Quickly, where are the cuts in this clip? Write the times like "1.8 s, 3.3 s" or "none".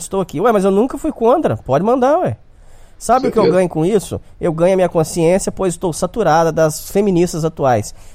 none